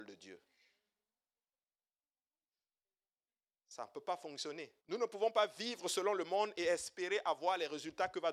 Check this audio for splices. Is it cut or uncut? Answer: cut